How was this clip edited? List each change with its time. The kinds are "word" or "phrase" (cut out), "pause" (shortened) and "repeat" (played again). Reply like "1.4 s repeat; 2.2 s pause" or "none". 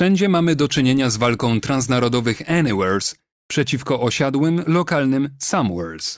none